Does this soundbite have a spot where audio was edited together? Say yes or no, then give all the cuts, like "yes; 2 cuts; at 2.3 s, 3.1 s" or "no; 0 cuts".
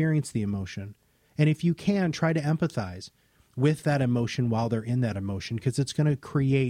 no; 0 cuts